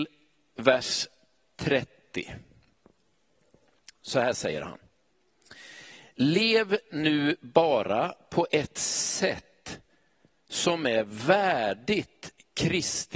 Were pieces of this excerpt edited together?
no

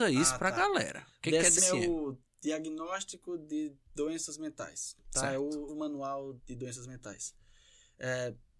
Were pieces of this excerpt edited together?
yes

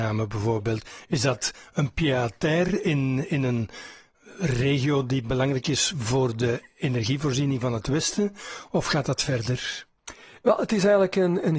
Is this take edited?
no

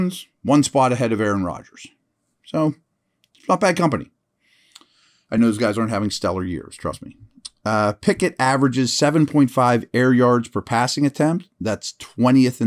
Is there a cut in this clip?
no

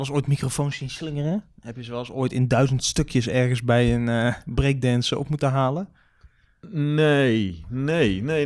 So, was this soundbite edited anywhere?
no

